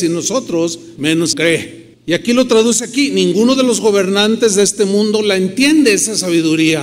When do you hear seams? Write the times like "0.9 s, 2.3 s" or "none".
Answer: 1.0 s, 1.3 s, 1.9 s